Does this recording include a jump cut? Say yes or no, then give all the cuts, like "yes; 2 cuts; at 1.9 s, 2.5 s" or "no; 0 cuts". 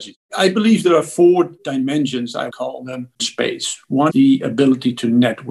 yes; 3 cuts; at 2.5 s, 3.2 s, 4.1 s